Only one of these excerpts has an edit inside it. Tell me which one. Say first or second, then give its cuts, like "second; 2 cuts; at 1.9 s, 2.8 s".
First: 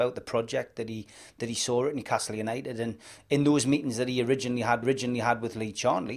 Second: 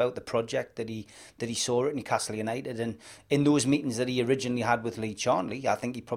first; 1 cut; at 4.8 s